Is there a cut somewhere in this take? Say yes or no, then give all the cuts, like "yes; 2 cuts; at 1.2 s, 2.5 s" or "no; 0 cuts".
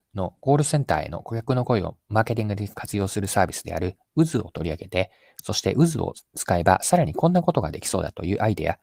no; 0 cuts